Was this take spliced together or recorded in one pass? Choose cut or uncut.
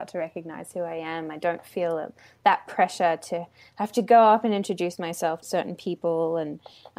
cut